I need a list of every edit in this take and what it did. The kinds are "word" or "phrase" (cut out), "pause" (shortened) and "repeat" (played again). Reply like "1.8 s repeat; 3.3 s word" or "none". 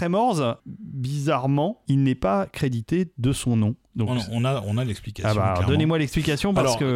none

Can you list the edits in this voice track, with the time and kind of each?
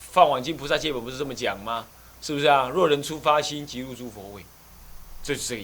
none

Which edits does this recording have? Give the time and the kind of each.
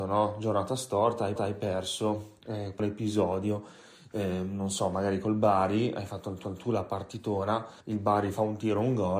1.4 s repeat; 2.8 s word; 6.4 s repeat; 7.8 s pause

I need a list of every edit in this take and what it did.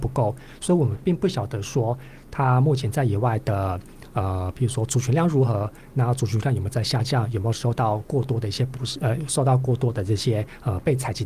none

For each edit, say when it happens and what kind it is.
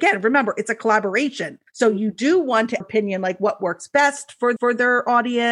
1.7 s pause; 2.8 s phrase; 4.6 s repeat

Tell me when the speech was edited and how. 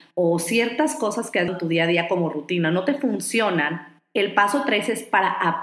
1.5 s word

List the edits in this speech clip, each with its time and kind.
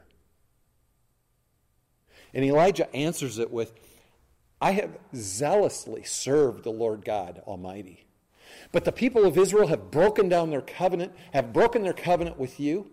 none

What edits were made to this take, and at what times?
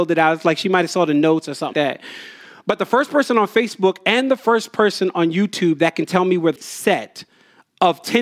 1.7 s word; 6.6 s word

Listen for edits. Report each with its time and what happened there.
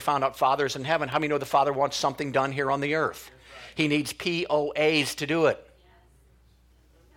none

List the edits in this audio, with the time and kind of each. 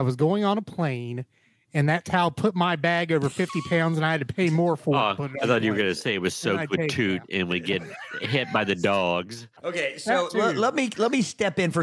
9.6 s pause

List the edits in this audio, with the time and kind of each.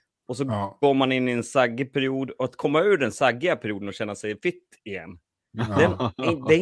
none

